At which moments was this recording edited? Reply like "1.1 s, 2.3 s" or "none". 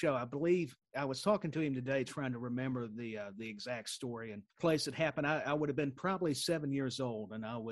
4.5 s